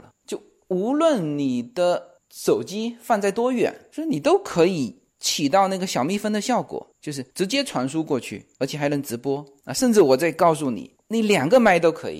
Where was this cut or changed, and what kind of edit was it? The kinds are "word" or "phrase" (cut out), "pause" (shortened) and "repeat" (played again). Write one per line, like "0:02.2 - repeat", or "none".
0:06.9 - pause
0:07.3 - pause
0:08.5 - pause